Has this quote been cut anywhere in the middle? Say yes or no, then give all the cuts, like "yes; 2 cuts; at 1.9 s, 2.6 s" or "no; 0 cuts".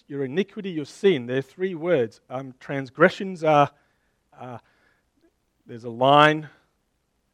yes; 1 cut; at 4.3 s